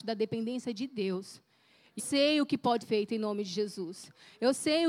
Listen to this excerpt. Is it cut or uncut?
cut